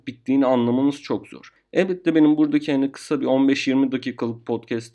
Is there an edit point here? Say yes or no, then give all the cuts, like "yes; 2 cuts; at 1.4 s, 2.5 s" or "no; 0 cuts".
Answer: no; 0 cuts